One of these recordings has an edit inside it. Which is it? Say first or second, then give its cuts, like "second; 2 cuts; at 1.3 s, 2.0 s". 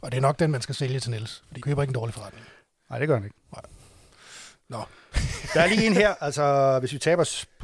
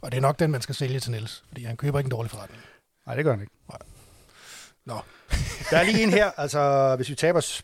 first; 1 cut; at 1.6 s